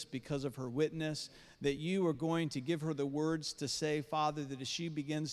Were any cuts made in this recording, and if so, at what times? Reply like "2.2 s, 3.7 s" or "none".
none